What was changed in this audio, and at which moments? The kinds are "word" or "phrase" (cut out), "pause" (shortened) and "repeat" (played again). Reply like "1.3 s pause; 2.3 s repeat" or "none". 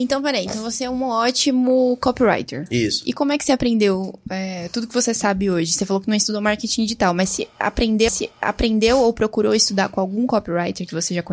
8.1 s repeat